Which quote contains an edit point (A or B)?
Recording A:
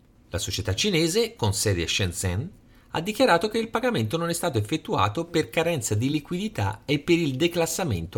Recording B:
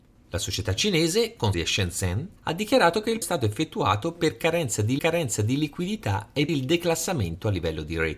B